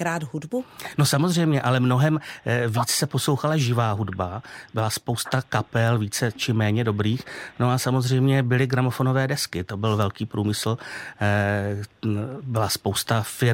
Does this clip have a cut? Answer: no; 0 cuts

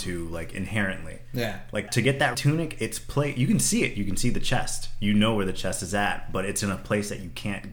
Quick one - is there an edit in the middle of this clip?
yes; 2 cuts; at 1.9 s, 2.3 s

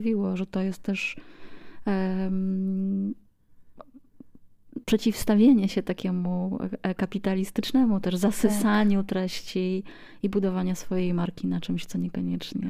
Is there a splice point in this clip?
yes; 1 cut; at 4.8 s

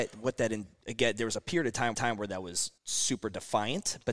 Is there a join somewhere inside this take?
yes; 2 cuts; at 1.9 s, 2.8 s

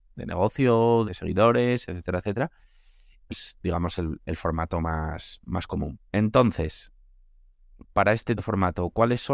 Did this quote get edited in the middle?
yes; 4 cuts; at 1.0 s, 3.3 s, 6.1 s, 8.4 s

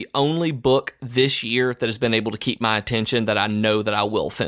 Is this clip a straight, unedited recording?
yes; 0 cuts

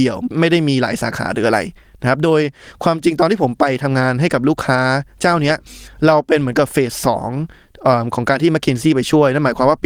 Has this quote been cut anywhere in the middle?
no; 0 cuts

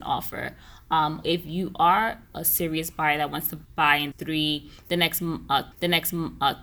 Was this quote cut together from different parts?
yes; 4 cuts; at 1.2 s, 3.6 s, 4.1 s, 5.7 s

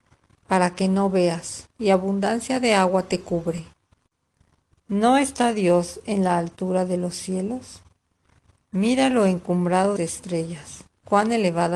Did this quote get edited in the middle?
yes; 1 cut; at 10.0 s

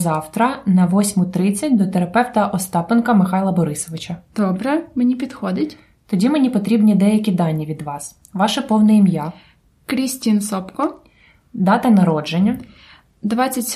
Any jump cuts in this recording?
no; 0 cuts

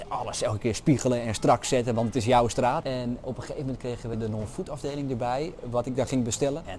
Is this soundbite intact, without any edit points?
yes; 0 cuts

